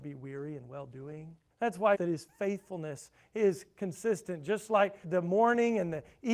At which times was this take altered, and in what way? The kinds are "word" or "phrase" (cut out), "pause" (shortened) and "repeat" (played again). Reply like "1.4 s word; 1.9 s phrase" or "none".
1.5 s pause; 1.9 s phrase; 5.0 s word